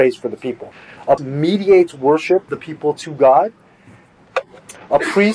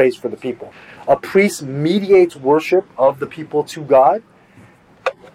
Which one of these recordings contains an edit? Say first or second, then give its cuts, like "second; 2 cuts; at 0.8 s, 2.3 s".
first; 2 cuts; at 1.2 s, 2.5 s